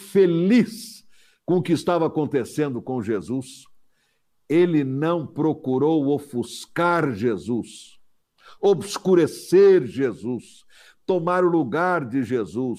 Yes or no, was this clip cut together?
no